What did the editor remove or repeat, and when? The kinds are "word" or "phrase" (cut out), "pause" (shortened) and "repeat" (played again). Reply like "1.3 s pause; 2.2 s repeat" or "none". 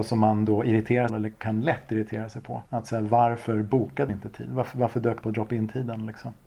1.1 s phrase; 2.7 s pause; 4.1 s word; 5.2 s phrase